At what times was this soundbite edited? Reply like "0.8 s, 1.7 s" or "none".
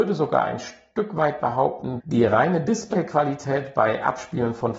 2.0 s